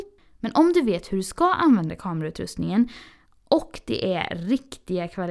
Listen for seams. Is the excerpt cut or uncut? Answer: uncut